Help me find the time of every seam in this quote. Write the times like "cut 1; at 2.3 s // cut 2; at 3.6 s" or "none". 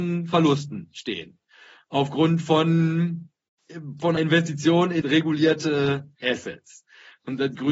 cut 1; at 4.2 s // cut 2; at 5.0 s